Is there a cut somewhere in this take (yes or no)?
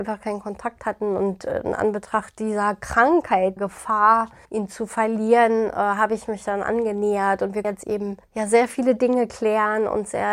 yes